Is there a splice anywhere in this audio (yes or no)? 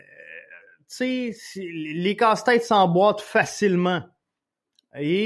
no